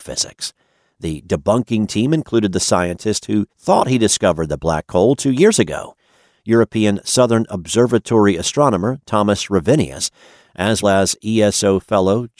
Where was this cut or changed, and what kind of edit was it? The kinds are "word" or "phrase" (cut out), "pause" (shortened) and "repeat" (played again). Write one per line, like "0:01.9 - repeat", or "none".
0:03.5 - pause
0:10.8 - word